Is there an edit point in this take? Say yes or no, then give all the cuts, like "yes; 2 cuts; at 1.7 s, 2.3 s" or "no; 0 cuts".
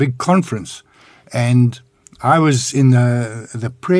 no; 0 cuts